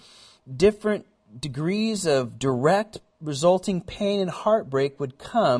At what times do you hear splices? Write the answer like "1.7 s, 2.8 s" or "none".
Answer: none